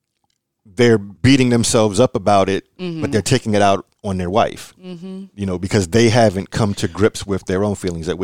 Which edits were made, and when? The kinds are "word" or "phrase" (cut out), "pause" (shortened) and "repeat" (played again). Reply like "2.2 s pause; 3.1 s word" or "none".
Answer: 1.2 s pause

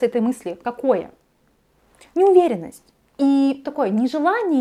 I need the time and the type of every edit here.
3.6 s word

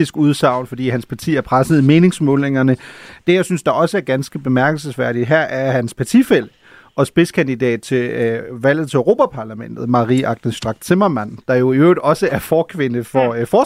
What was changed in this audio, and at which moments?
none

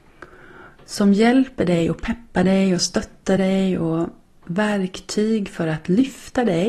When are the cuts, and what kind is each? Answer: none

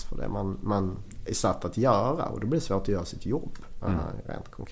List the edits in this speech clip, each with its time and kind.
none

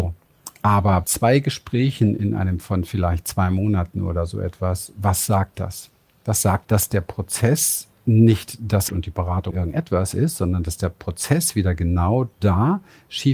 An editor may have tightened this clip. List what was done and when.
1.0 s word; 2.6 s word; 5.5 s word; 6.6 s word; 8.9 s word; 9.5 s word

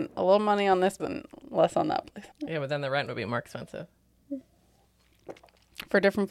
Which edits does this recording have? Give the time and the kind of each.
1.0 s word; 2.3 s pause

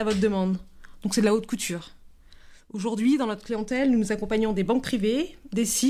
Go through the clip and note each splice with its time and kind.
none

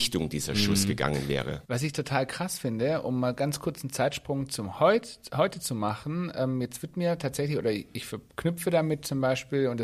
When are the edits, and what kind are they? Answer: 1.7 s pause

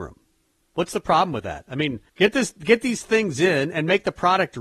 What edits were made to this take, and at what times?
2.1 s pause

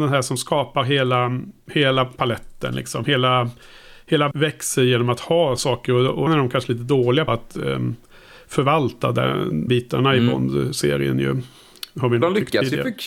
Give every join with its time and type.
4.3 s word; 5.6 s word; 6.3 s word; 7.3 s word; 9.7 s word

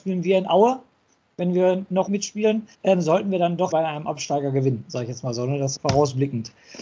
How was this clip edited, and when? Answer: 2.1 s phrase; 2.7 s pause; 3.7 s word; 5.8 s word

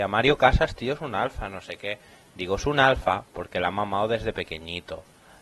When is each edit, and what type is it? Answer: none

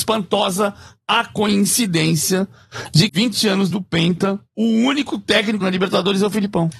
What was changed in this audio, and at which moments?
3.1 s word; 3.7 s word; 5.6 s word

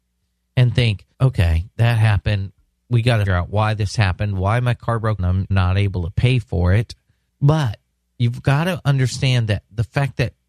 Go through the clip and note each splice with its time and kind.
1.1 s pause; 3.3 s word; 5.2 s word; 5.5 s word

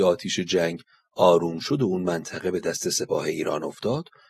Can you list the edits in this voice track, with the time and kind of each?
none

